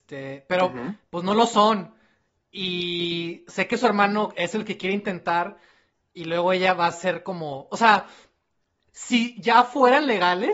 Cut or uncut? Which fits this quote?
uncut